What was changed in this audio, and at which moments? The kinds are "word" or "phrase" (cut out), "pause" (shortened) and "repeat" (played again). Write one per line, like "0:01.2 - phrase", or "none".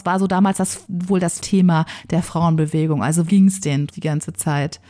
0:01.4 - word
0:03.3 - word
0:03.9 - word